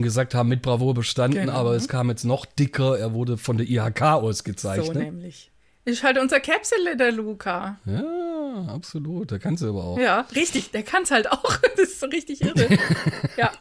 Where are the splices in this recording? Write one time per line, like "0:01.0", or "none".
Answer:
none